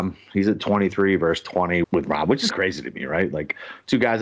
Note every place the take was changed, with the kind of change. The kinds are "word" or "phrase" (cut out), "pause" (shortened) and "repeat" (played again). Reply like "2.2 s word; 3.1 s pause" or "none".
1.8 s word; 2.5 s phrase